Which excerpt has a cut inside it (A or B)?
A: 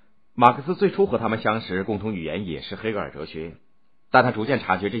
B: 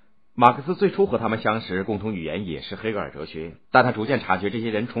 B